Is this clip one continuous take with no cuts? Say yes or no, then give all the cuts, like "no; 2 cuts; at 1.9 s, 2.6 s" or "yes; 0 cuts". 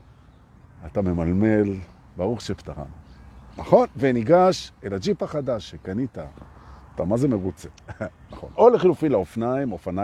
no; 2 cuts; at 2.1 s, 7.7 s